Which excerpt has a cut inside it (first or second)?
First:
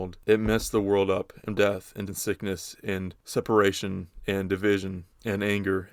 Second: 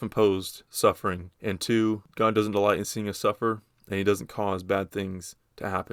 first